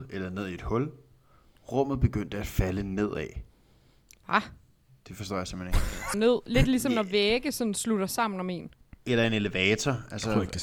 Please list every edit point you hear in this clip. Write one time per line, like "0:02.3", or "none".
0:06.1